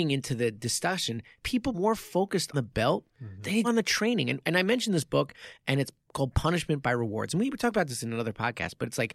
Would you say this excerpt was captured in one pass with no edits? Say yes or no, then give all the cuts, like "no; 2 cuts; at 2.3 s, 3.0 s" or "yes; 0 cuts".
no; 3 cuts; at 1.7 s, 2.5 s, 3.6 s